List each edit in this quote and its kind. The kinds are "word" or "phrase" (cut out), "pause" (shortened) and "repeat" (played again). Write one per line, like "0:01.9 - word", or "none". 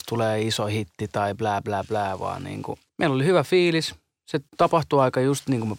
0:02.9 - pause
0:04.5 - pause